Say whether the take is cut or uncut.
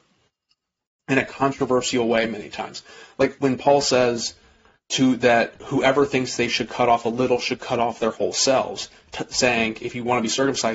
cut